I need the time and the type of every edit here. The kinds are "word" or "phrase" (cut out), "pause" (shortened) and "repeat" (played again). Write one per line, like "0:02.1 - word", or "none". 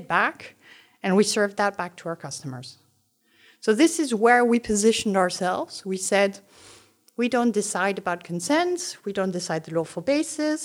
none